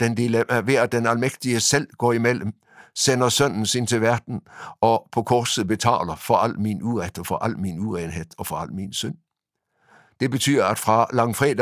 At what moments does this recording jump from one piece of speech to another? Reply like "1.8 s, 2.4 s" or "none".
none